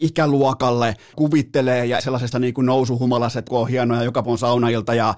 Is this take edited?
yes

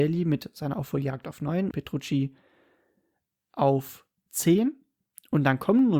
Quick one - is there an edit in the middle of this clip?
yes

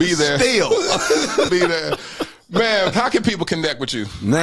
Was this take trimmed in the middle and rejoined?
yes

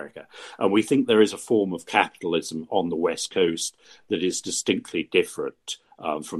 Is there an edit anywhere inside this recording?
no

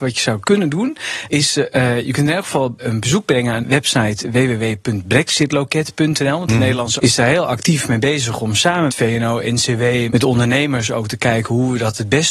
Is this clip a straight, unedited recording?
no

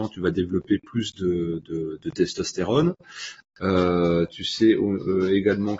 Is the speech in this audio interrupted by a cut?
no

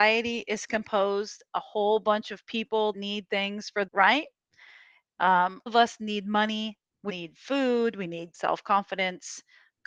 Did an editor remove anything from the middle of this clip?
yes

